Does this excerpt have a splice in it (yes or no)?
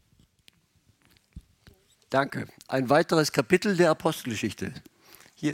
no